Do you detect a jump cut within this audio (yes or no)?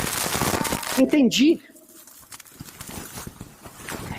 yes